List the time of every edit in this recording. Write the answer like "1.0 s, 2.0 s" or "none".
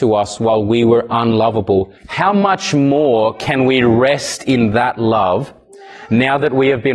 2.0 s